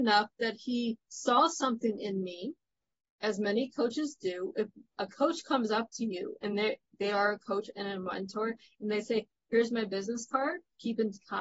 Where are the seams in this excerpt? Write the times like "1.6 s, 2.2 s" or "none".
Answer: none